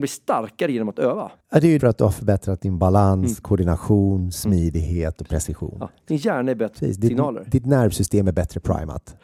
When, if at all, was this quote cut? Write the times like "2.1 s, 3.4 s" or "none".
1.4 s, 1.8 s, 6.8 s